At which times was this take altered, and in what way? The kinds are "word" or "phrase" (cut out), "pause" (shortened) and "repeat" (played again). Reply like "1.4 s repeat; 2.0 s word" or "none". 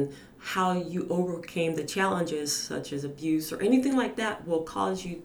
none